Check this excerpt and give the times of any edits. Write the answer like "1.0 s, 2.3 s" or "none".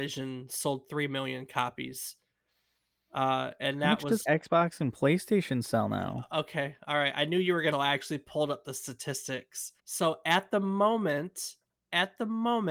4.2 s, 7.7 s, 9.8 s